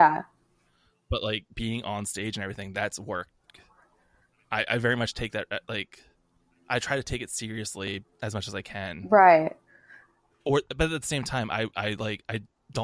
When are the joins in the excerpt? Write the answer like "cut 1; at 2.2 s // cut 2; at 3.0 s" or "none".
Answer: cut 1; at 8.1 s